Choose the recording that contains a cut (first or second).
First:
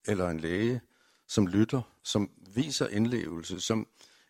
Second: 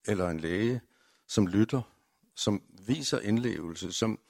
first